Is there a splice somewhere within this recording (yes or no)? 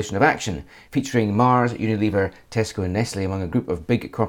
no